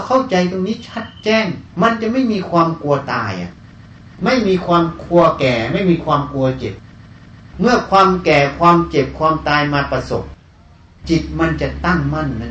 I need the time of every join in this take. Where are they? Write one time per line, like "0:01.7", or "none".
0:01.7

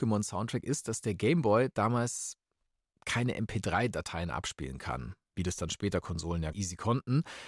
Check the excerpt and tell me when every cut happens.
0:06.5

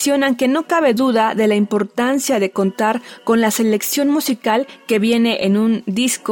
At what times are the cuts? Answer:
none

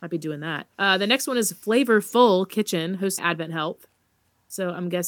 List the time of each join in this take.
0:03.2

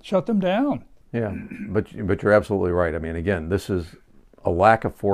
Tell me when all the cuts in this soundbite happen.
none

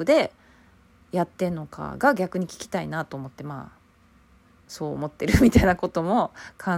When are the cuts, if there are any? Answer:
none

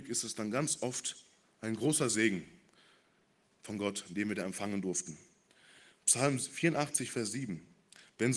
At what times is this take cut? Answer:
none

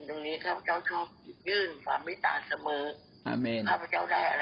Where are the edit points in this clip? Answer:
none

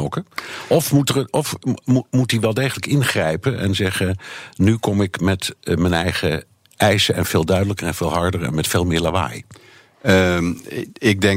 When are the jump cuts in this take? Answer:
none

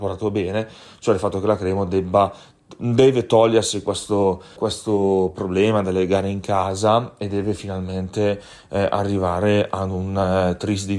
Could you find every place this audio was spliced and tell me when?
0:04.6

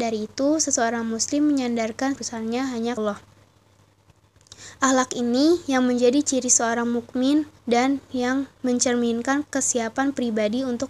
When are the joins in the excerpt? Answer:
0:02.2
0:03.0
0:07.6
0:08.5

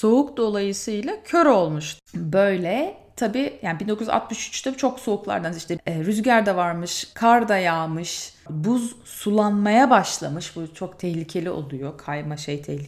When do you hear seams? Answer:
0:02.1
0:07.1

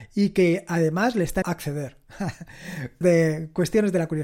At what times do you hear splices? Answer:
0:01.4
0:03.0

